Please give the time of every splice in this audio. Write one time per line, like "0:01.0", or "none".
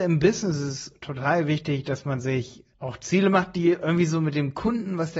0:02.7